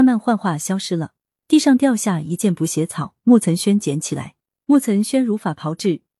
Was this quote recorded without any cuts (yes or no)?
yes